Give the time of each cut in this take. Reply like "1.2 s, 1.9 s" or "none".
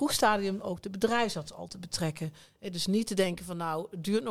none